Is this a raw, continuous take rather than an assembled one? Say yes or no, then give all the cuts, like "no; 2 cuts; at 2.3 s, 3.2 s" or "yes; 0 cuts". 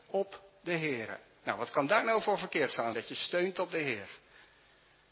no; 1 cut; at 2.9 s